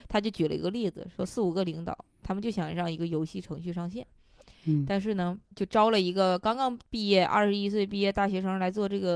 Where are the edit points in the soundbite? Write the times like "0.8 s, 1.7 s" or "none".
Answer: 5.4 s, 6.9 s

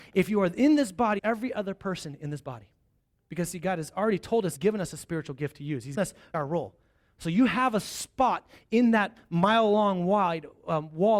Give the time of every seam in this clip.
1.2 s, 4.6 s, 6.0 s, 6.3 s

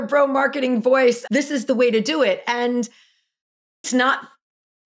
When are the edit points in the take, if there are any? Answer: 1.3 s, 3.8 s

